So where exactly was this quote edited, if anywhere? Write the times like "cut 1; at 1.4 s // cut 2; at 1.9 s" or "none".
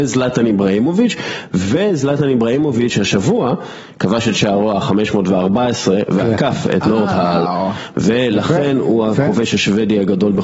none